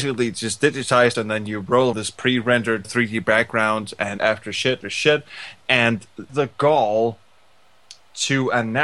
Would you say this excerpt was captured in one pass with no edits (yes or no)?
no